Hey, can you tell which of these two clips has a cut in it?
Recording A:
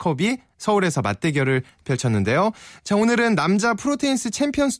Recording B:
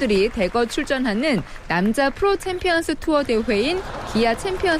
B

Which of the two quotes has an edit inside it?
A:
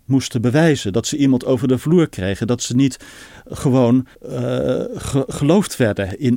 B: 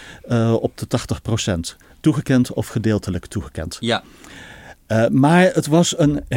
A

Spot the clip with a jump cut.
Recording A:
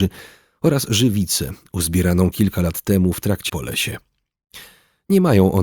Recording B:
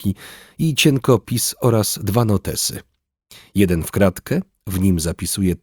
A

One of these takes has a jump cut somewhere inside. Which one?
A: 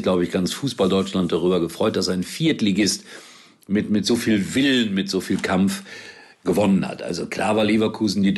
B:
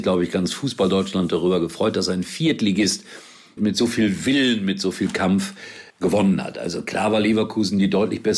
B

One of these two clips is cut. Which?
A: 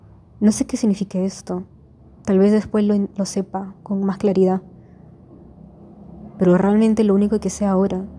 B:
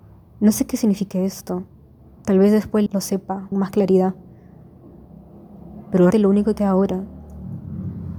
B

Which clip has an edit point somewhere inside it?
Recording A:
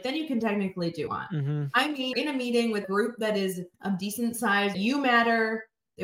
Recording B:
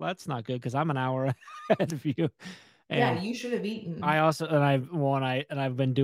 A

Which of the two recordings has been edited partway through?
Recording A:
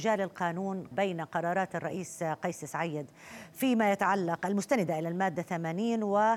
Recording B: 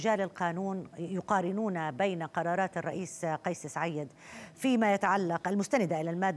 A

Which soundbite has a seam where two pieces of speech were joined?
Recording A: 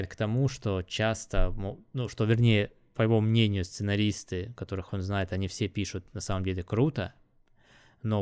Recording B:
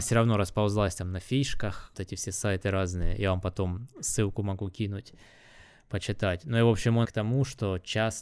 B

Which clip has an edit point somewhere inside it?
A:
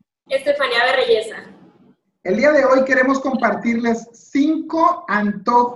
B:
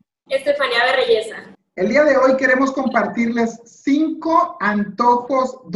B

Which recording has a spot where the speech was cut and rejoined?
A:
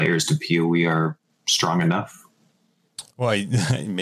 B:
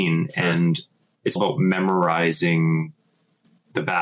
B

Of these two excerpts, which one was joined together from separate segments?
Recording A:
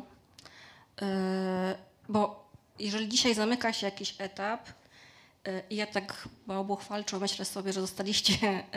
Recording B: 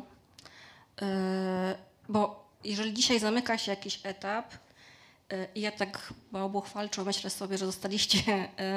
B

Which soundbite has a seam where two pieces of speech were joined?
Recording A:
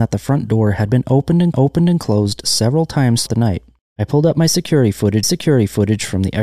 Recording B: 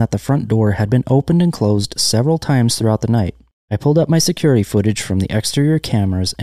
A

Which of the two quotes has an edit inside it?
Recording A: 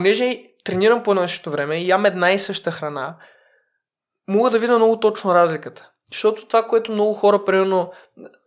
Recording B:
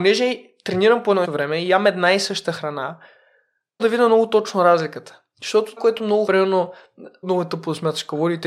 B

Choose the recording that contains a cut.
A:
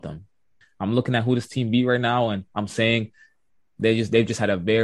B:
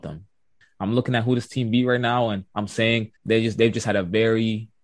B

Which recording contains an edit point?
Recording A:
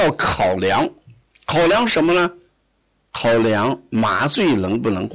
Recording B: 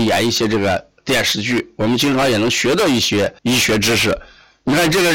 B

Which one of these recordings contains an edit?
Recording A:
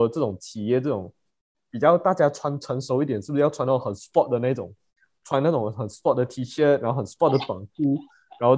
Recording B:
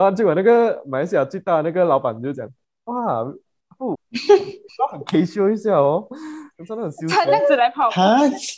B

